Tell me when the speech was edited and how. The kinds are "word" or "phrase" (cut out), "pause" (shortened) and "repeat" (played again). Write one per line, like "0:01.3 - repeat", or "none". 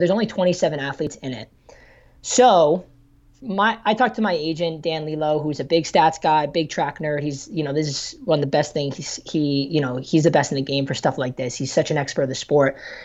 none